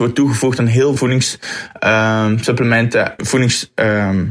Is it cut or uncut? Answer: cut